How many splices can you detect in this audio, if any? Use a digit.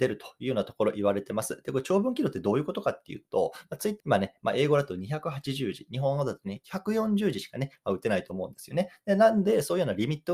1